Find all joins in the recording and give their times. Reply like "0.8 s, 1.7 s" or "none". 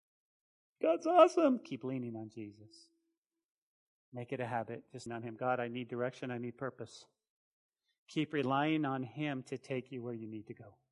5.1 s